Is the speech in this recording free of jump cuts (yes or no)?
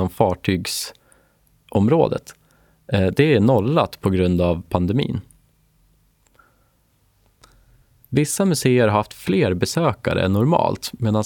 yes